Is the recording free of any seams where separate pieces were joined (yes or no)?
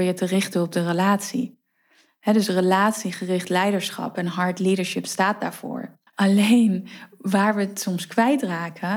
no